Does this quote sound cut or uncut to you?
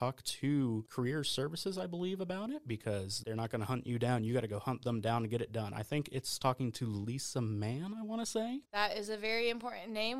cut